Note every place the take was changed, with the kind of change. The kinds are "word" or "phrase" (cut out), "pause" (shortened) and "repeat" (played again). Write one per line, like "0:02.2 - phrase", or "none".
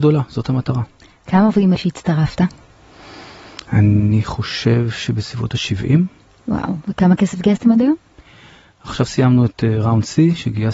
0:01.7 - word